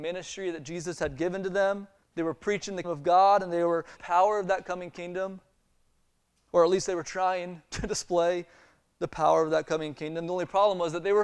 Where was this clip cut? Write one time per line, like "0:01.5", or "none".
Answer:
0:02.0
0:02.8
0:04.0

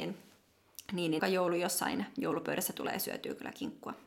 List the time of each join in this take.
0:01.2

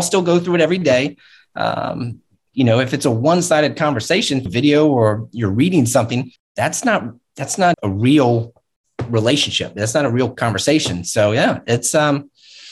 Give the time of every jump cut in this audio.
0:02.5
0:04.5
0:06.4
0:07.7
0:10.3

